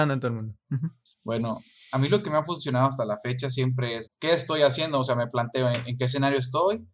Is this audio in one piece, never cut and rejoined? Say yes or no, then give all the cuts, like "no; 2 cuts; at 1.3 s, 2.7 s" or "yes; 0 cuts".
no; 2 cuts; at 1.1 s, 4.1 s